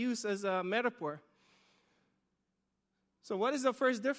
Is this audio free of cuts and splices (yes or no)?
yes